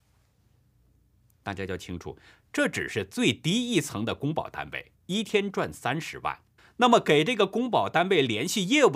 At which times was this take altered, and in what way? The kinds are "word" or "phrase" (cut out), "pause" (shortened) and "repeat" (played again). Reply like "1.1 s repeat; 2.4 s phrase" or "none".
4.9 s pause; 6.6 s pause